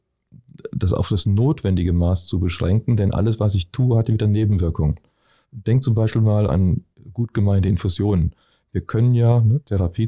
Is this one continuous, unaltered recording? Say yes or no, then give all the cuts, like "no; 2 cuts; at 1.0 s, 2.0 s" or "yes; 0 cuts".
no; 1 cut; at 6.5 s